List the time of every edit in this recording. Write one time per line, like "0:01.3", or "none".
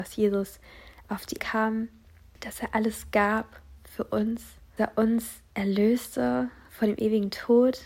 0:01.4
0:04.8